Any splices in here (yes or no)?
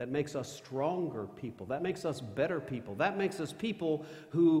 no